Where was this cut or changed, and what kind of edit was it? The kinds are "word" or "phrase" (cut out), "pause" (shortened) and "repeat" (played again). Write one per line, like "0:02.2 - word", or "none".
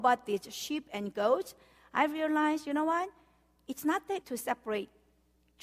0:04.2 - word